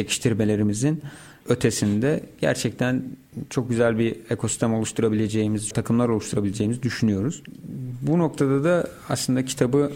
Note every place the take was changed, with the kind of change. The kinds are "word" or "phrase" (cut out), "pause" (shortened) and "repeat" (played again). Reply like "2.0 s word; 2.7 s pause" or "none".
5.7 s phrase